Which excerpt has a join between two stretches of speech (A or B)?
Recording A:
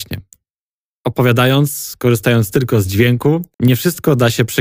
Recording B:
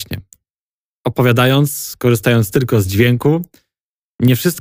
A